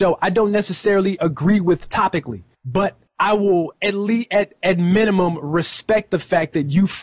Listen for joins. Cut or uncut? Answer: uncut